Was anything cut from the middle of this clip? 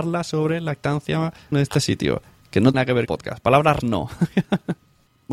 yes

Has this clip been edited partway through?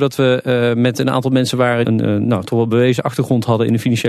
yes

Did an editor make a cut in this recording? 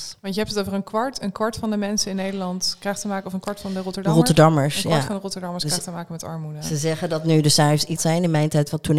yes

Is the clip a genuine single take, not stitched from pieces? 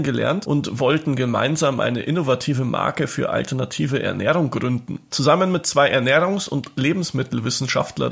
yes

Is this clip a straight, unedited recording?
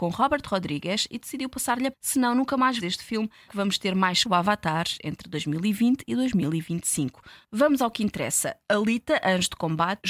no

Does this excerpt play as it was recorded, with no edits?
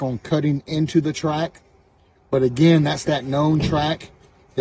yes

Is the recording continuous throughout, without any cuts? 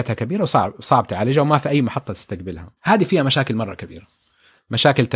no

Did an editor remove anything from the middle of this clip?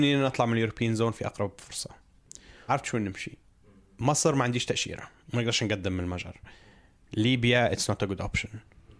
yes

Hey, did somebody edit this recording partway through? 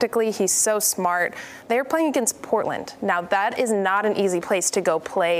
no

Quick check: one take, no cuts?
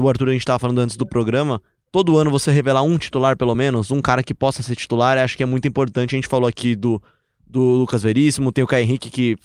yes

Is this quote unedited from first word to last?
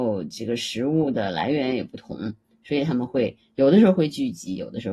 yes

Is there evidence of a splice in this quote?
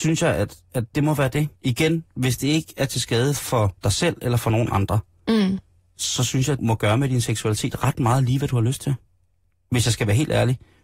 yes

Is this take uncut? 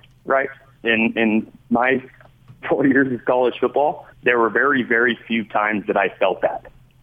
no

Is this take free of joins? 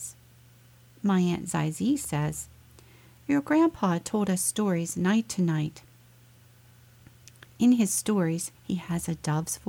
no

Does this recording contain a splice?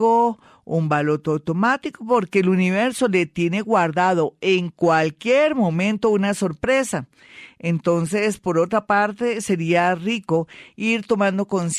no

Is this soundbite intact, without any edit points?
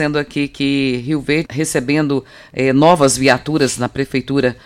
no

